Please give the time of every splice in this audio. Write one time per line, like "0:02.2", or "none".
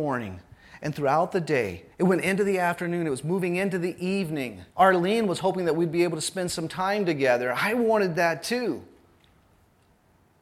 0:01.9
0:04.7